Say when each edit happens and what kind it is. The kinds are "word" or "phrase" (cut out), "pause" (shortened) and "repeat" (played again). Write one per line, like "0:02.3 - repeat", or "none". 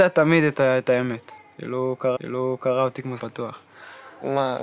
0:02.2 - repeat
0:03.2 - word